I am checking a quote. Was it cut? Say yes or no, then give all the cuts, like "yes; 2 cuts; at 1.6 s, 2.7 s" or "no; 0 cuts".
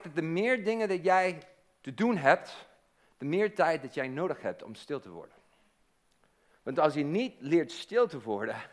no; 0 cuts